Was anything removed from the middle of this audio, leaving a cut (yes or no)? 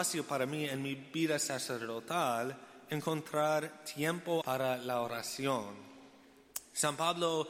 yes